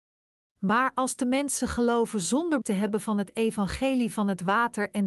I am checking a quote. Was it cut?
yes; 1 cut; at 2.6 s

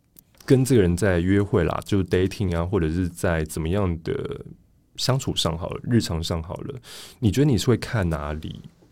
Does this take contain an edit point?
no; 0 cuts

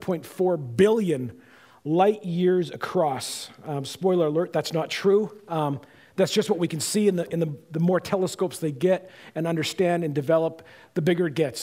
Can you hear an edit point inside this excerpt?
no; 0 cuts

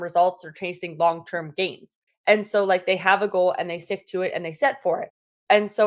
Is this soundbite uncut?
yes; 0 cuts

